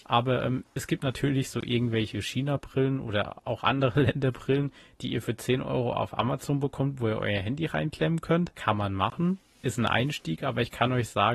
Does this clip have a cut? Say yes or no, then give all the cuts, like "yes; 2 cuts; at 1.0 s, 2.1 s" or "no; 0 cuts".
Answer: no; 0 cuts